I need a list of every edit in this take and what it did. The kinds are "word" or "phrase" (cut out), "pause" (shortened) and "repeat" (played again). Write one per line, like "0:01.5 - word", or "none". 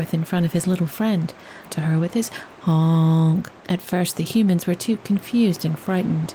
0:01.7 - phrase
0:02.5 - word
0:03.6 - pause